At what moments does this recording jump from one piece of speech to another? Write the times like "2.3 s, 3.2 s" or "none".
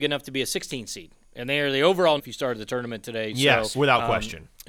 2.2 s, 3.7 s